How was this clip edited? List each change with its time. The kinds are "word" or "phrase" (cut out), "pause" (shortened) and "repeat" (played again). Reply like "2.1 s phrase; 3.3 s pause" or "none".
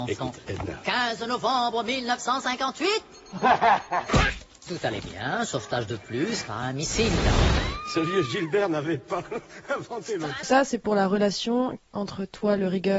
6.5 s phrase; 10.4 s word